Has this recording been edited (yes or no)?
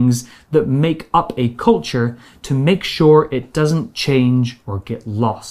no